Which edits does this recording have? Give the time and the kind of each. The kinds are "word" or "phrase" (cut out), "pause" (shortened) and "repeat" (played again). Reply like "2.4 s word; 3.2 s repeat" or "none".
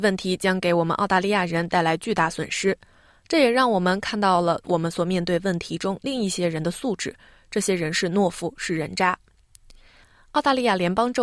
none